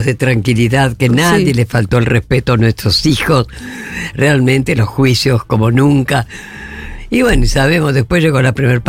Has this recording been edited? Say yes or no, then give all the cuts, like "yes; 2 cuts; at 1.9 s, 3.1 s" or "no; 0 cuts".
no; 0 cuts